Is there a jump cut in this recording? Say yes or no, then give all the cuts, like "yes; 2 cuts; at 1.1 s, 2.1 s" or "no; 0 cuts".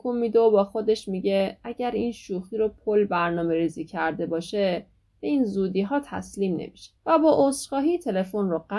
yes; 1 cut; at 7.0 s